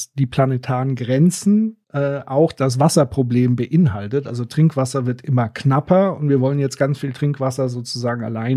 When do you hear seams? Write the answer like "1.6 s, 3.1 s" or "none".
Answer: 1.8 s